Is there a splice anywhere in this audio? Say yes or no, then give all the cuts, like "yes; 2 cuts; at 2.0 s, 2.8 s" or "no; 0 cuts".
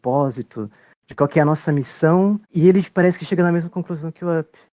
yes; 1 cut; at 2.4 s